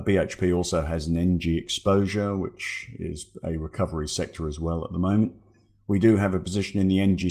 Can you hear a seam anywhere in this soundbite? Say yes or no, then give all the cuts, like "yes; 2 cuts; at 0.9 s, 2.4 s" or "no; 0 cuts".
no; 0 cuts